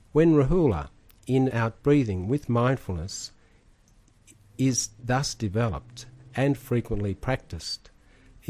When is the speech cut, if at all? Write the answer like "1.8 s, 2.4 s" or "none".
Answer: 1.5 s